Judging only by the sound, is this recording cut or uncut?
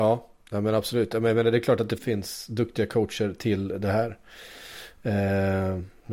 cut